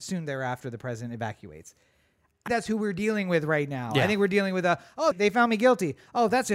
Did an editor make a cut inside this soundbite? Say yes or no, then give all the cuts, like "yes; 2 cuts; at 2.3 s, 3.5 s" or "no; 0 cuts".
yes; 2 cuts; at 2.5 s, 5.1 s